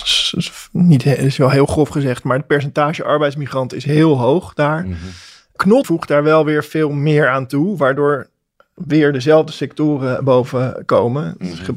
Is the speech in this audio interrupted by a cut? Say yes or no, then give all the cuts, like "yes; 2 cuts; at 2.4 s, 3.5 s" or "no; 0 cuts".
yes; 1 cut; at 5.8 s